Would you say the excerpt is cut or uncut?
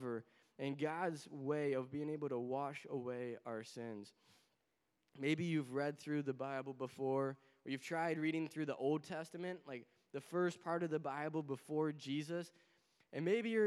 uncut